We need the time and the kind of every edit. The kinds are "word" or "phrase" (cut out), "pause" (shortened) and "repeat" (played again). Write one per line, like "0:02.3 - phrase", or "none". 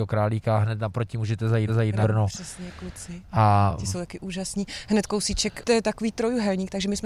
0:01.7 - repeat
0:02.0 - word